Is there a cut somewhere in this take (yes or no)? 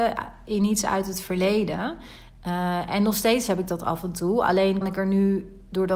yes